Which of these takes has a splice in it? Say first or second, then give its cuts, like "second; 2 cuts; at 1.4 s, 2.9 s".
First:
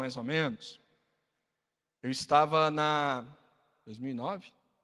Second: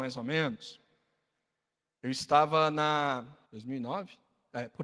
second; 1 cut; at 3.4 s